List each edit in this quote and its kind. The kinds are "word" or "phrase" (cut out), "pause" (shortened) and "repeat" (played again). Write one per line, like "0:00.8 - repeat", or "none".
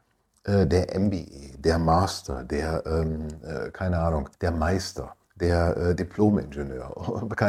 0:04.3 - pause
0:05.2 - pause

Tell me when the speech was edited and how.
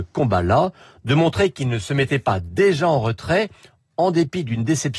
none

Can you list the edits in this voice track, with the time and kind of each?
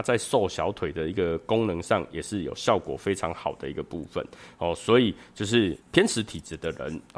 0:05.8 - pause

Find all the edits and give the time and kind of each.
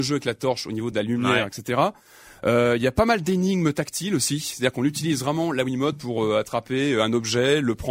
none

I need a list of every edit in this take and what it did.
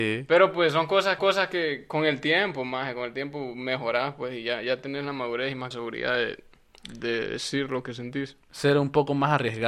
0:01.2 - repeat
0:05.7 - phrase

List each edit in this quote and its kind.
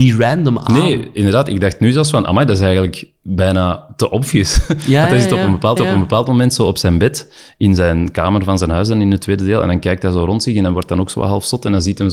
0:05.8 - repeat

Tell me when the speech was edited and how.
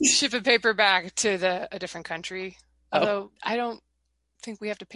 0:03.4 - pause

